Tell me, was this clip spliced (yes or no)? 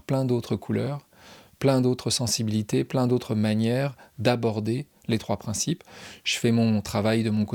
no